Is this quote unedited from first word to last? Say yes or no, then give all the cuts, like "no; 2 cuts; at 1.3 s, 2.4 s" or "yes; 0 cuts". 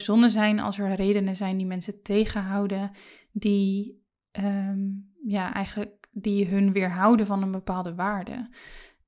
yes; 0 cuts